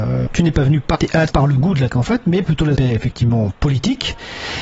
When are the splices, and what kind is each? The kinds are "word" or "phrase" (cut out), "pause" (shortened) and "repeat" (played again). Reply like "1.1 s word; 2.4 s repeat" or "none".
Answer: 0.9 s word; 1.3 s word; 1.9 s word; 2.4 s word; 2.7 s word